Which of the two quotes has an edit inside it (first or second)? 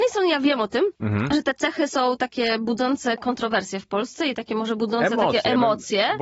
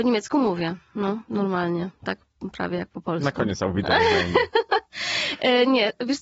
first